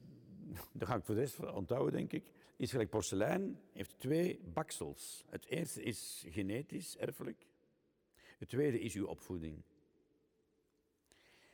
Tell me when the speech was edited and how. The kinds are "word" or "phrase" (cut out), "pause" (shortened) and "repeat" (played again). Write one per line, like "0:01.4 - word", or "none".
0:02.4 - pause